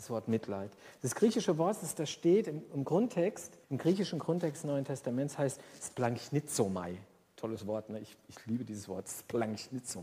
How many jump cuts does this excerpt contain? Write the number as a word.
one